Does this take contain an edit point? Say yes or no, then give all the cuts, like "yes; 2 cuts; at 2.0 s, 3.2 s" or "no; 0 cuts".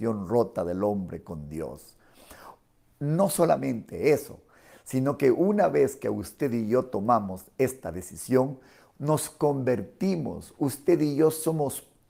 no; 0 cuts